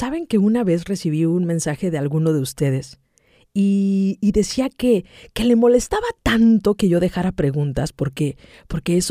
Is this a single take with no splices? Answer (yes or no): yes